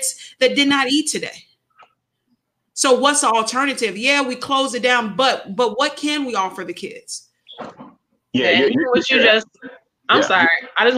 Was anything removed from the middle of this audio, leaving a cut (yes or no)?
no